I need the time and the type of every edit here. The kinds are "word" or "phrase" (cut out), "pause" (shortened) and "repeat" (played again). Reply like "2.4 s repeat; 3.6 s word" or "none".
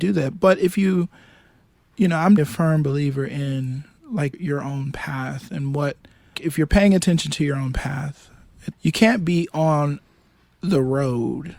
2.4 s word; 4.3 s word; 6.3 s word; 8.7 s word